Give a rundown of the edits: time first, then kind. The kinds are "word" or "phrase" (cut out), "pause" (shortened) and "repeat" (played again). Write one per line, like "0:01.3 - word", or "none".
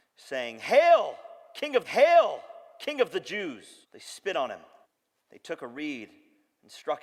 0:01.8 - repeat
0:03.8 - pause
0:04.8 - pause